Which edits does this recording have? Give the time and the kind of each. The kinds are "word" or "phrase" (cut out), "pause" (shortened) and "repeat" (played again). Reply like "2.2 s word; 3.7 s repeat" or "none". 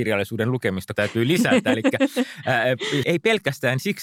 0.9 s word; 3.0 s word